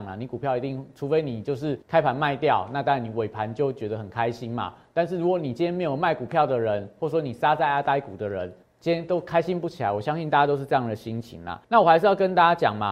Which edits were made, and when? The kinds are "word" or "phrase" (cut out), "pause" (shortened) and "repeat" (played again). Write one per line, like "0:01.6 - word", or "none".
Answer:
0:01.8 - pause
0:08.6 - pause
0:11.6 - pause